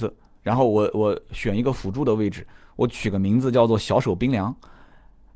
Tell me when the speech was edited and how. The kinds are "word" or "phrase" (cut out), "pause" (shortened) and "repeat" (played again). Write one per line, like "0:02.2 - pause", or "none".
none